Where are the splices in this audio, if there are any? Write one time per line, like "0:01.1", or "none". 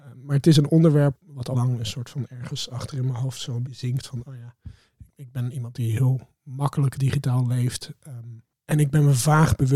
0:01.1
0:01.5
0:03.7
0:05.1